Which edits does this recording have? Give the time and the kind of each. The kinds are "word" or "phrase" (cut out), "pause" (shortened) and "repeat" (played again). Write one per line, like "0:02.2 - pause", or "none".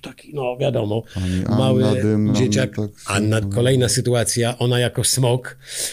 0:02.3 - word
0:03.4 - word

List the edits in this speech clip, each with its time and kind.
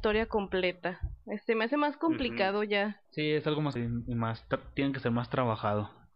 0:03.0 - pause
0:03.8 - word

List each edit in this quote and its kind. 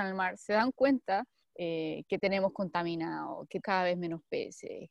0:01.4 - pause
0:03.6 - word

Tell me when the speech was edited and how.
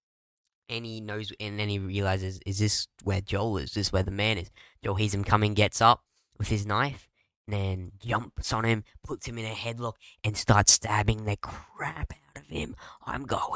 none

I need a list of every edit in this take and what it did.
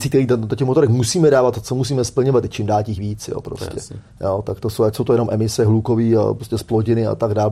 none

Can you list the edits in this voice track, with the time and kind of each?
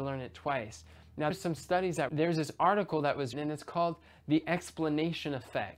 0:01.3 - word
0:02.1 - phrase
0:03.3 - word

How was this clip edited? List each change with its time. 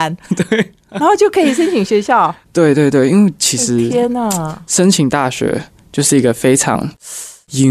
none

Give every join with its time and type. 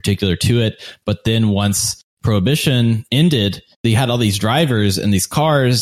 0:03.7 - pause

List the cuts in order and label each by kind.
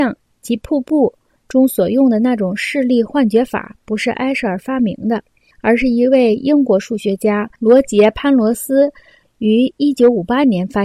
none

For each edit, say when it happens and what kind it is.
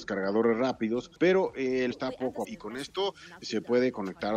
0:01.2 - pause
0:01.9 - phrase
0:02.4 - phrase
0:03.4 - word

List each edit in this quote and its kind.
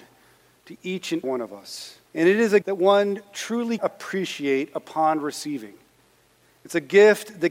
0:01.2 - word
0:02.1 - pause
0:02.6 - word
0:03.8 - word

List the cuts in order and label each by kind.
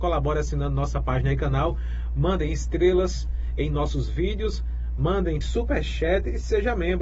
0:05.4 - word

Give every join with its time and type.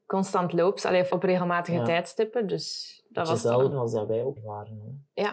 0:01.1 - word
0:03.7 - word
0:04.4 - word

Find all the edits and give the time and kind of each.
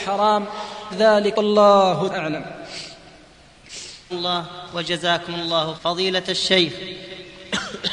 0:00.9 - word
0:01.3 - word
0:02.1 - word
0:04.1 - word
0:05.8 - word

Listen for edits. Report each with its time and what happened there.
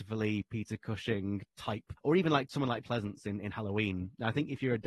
0:02.0 - word
0:02.8 - word

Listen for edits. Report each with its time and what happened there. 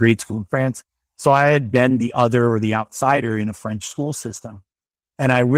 none

